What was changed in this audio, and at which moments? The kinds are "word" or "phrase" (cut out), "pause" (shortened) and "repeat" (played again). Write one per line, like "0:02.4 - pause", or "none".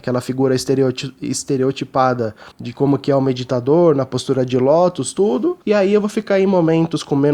0:02.5 - pause
0:05.6 - pause